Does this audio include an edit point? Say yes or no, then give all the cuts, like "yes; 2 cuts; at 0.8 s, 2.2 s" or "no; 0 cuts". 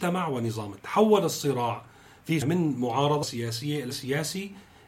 yes; 3 cuts; at 2.4 s, 3.2 s, 3.9 s